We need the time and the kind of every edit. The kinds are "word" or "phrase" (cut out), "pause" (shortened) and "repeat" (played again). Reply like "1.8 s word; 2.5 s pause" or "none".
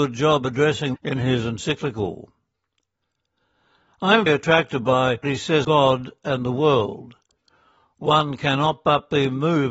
0.9 s word; 4.3 s word; 5.2 s word; 5.6 s word